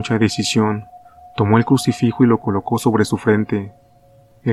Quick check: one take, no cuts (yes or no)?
yes